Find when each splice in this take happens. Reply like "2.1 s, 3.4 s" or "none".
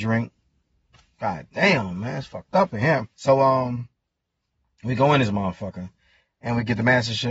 3.1 s